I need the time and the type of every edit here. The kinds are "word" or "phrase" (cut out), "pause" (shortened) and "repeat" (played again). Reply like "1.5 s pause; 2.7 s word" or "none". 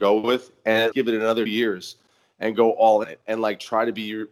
0.9 s word; 1.5 s word; 3.0 s phrase